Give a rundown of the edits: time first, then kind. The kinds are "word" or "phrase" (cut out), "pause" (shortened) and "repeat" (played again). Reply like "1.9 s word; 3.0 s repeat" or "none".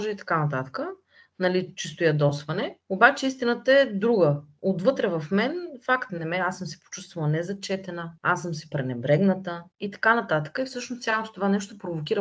6.1 s phrase; 8.7 s word; 9.7 s pause

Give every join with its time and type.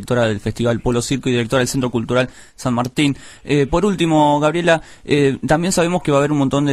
none

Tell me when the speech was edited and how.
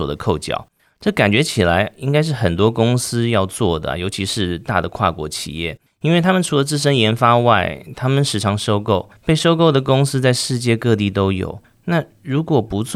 none

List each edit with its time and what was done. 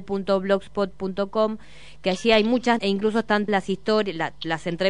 2.8 s word; 3.5 s word

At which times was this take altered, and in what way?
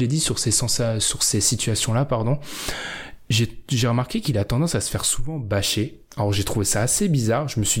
none

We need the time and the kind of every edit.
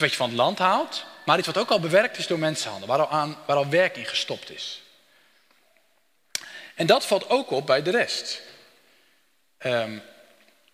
none

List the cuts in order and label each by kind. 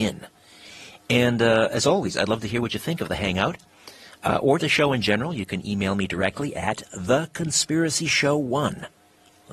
4.6 s word

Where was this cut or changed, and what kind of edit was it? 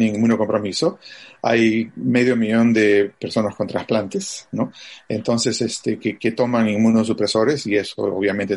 none

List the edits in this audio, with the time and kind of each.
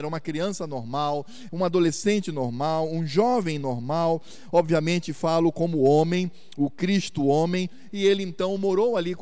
none

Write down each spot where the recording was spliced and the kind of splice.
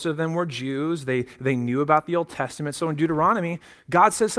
none

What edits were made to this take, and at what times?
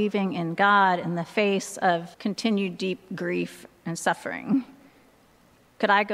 2.1 s pause

